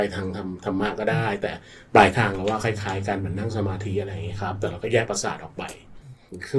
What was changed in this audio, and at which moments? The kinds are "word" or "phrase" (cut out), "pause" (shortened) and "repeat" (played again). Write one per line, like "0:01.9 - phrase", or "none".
none

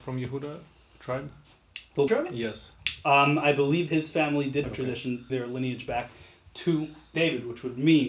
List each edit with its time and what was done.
0:02.1 - word
0:03.9 - word
0:04.6 - word
0:05.3 - word
0:07.1 - word

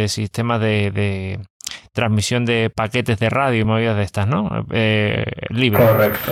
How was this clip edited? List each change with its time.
none

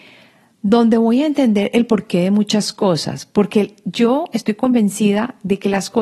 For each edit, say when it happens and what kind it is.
none

